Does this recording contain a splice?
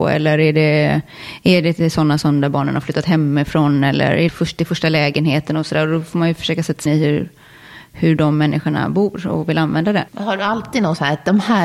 yes; 3 cuts; at 4.3 s, 6.9 s, 10.1 s

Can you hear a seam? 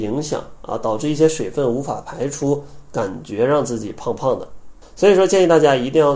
yes; 1 cut; at 4.8 s

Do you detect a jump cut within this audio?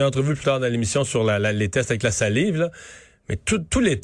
no; 0 cuts

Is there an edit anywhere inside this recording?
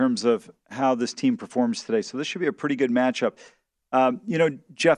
no; 0 cuts

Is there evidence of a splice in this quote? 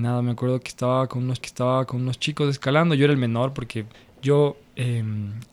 yes; 2 cuts; at 1.4 s, 3.9 s

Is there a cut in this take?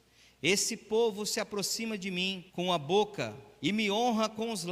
yes; 2 cuts; at 2.5 s, 3.5 s

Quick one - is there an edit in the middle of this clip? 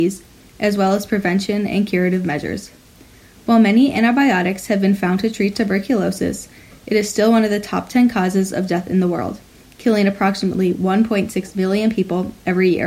no; 0 cuts

